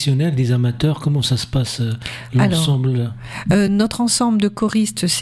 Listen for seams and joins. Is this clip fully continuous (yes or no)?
yes